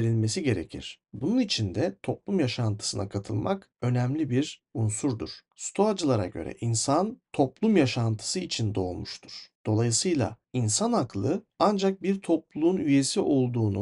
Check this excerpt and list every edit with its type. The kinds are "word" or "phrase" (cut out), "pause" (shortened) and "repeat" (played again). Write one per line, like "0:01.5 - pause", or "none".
none